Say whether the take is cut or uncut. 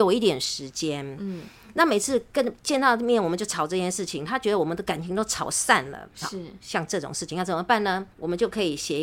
cut